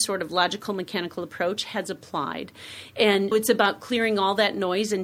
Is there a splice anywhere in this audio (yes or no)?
yes